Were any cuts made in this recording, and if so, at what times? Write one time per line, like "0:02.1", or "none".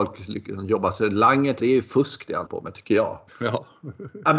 0:01.6
0:02.5
0:03.3

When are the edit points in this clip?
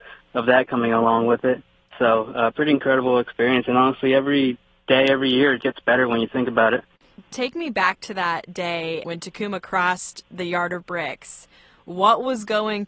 0:05.6
0:09.0

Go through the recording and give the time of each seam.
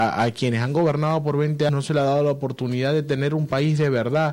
0:01.7

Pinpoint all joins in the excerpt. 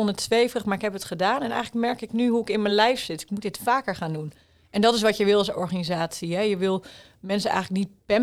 none

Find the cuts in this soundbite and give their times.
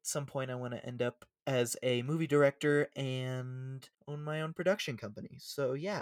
0:01.4
0:03.9

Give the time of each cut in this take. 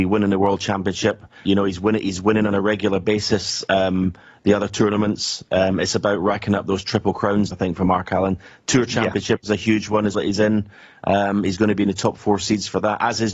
0:07.5
0:10.1

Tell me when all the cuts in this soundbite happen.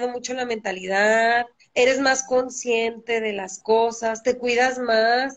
0:01.6

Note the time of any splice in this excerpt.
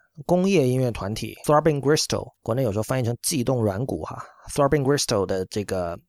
0:01.4
0:02.4

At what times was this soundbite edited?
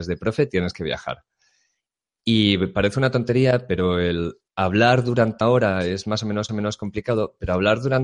0:04.5
0:05.4
0:06.5

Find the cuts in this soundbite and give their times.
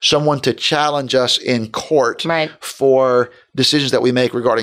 none

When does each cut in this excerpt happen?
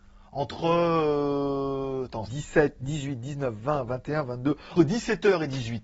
0:02.3
0:04.8

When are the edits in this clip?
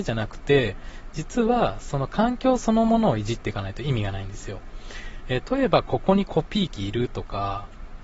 0:05.4

